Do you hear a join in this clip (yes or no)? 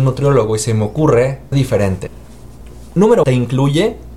yes